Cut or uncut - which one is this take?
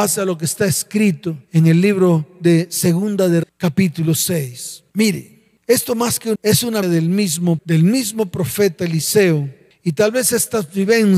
cut